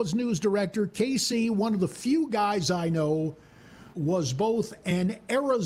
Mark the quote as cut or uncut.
cut